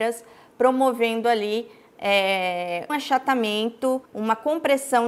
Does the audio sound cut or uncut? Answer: cut